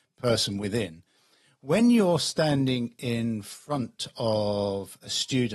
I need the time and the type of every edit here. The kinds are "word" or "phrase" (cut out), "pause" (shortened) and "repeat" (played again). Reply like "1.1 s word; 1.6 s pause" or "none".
none